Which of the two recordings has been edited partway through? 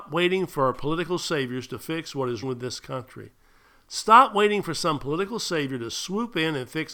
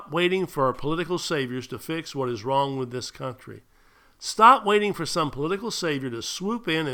first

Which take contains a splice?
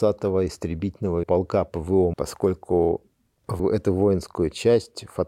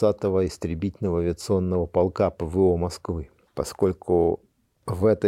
first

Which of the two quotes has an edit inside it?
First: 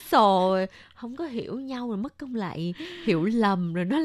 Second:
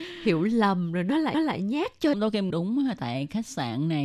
second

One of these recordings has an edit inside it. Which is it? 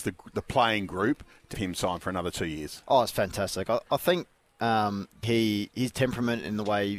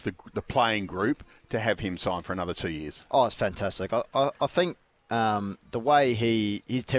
first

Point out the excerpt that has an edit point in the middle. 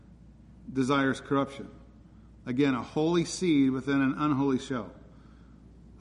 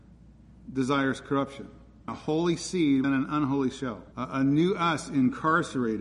second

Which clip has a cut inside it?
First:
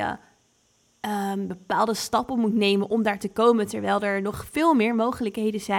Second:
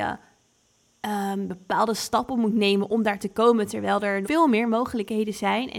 second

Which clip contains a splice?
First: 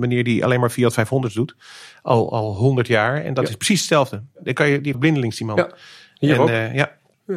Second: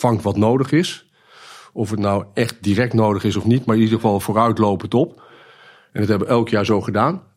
first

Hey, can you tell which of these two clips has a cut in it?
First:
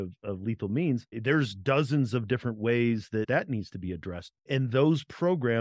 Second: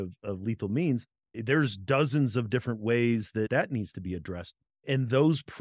first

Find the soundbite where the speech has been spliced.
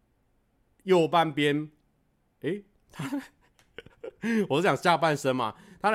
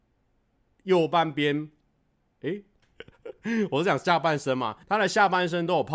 second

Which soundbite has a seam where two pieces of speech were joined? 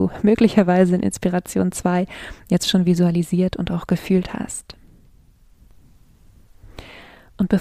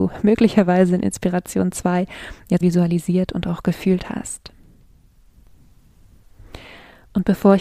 second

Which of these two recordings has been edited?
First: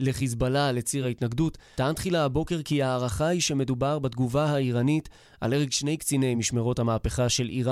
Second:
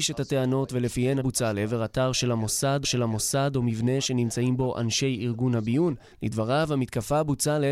second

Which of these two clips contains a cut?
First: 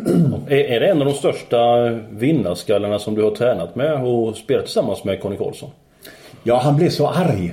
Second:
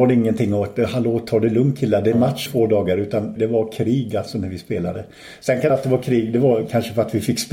second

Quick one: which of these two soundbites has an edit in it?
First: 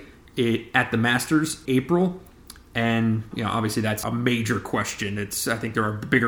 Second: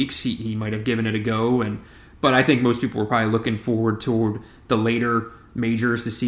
first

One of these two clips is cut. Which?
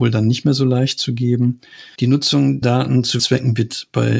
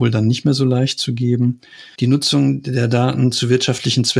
first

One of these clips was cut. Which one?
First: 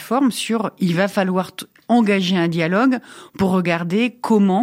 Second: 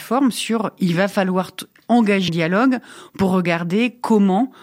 second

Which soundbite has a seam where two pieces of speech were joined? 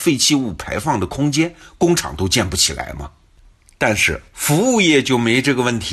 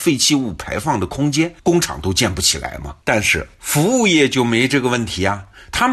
second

